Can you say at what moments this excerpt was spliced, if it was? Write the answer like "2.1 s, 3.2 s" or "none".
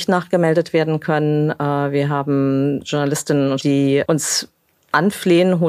3.6 s

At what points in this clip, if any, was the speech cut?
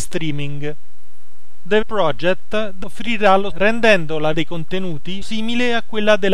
1.8 s, 2.8 s, 3.5 s, 4.3 s, 5.2 s

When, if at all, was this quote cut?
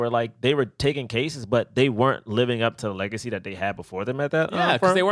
none

